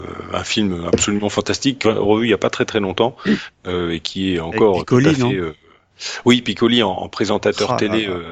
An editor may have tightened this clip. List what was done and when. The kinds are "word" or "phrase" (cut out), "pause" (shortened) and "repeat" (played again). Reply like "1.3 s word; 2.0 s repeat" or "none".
1.8 s word